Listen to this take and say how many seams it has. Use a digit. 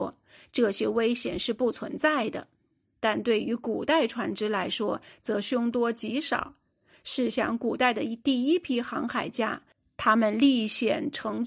0